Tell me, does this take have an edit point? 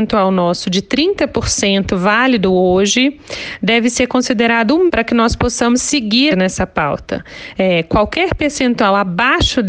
yes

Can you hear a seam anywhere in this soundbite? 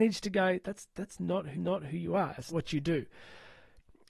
yes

